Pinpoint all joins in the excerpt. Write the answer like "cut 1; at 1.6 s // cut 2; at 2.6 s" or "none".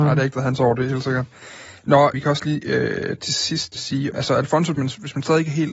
cut 1; at 2.1 s // cut 2; at 3.8 s // cut 3; at 4.1 s // cut 4; at 4.7 s